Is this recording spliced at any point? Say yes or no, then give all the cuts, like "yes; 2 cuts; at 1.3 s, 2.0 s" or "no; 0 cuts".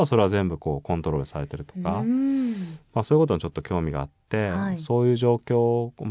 no; 0 cuts